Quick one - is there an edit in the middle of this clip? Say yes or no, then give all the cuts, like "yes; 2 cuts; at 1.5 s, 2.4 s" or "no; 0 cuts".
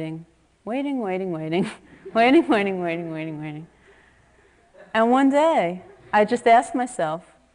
yes; 1 cut; at 6.0 s